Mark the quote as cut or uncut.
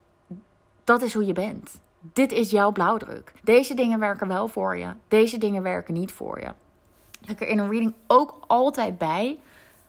cut